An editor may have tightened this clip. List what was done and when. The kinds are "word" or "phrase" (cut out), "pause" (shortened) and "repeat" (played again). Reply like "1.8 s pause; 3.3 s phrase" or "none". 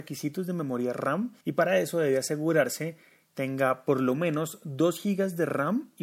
1.4 s pause; 3.3 s phrase

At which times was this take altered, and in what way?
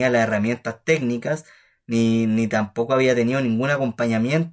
none

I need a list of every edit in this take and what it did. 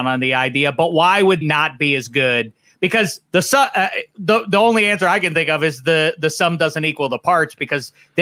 1.4 s word; 3.3 s pause

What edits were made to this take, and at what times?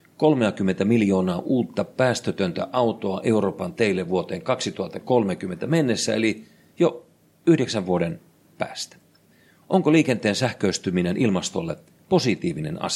none

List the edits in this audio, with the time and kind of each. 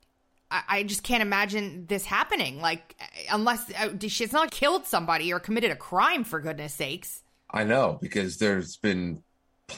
4.5 s word

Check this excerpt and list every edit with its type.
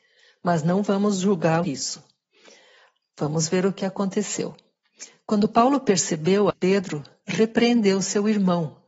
1.6 s phrase; 6.5 s phrase

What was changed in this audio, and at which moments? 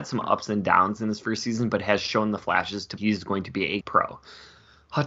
3.0 s word; 3.8 s word

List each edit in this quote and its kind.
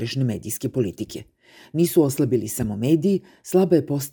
none

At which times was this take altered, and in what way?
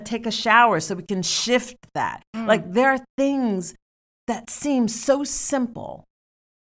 none

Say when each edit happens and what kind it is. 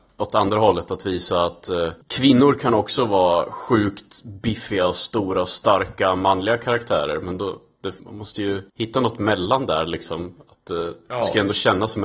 2.0 s pause; 8.0 s pause; 8.7 s pause

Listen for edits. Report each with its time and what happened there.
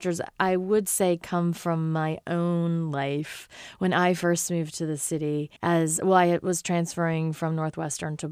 5.6 s pause

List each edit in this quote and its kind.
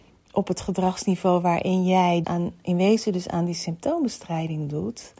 2.2 s word

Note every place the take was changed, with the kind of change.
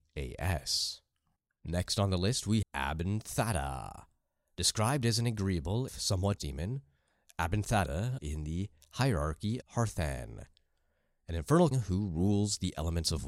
2.6 s word; 5.9 s word; 6.4 s word; 8.2 s word; 9.6 s word; 11.7 s word

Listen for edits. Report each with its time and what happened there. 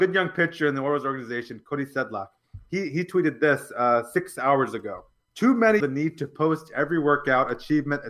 5.3 s pause; 5.8 s phrase

